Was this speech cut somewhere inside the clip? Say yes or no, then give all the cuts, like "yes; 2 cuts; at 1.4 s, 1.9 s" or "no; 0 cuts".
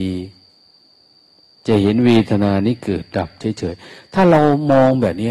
no; 0 cuts